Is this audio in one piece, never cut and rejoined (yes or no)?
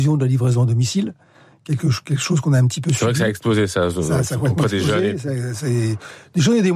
yes